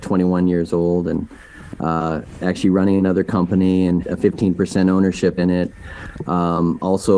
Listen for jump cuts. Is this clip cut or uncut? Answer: cut